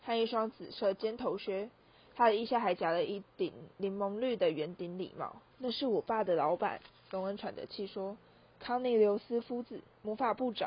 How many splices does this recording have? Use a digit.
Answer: 1